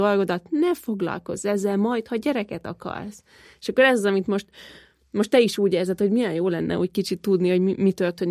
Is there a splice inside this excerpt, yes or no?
no